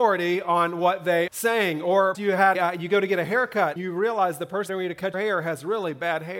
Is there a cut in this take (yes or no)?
yes